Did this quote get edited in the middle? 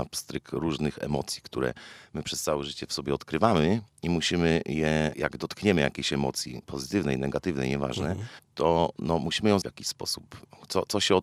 yes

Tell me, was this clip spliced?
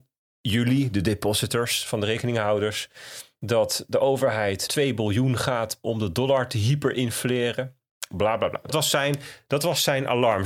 yes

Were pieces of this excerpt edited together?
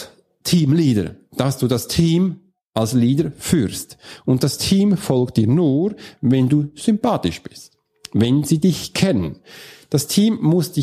no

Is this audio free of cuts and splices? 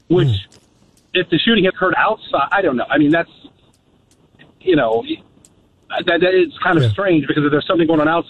no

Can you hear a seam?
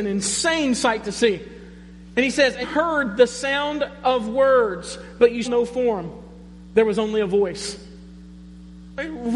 yes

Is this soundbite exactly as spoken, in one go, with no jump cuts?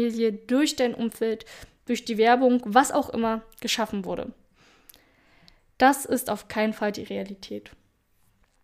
yes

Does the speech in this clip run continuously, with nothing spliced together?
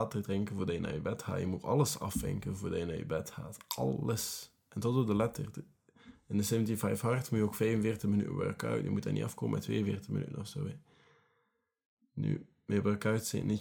yes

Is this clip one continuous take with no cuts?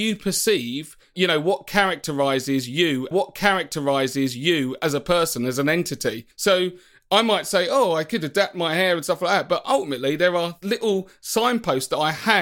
no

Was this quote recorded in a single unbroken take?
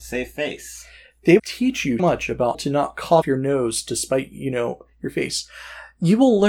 no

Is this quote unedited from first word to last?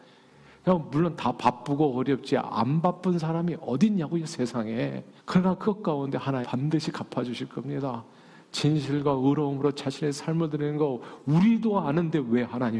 no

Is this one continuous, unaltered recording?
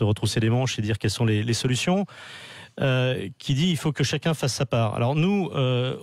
yes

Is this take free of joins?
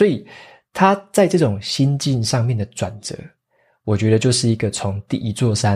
yes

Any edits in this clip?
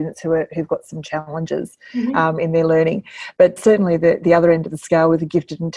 yes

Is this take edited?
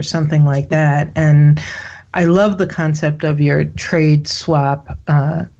no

